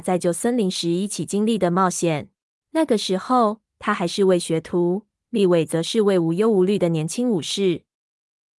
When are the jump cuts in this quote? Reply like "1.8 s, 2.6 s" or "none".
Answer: 2.5 s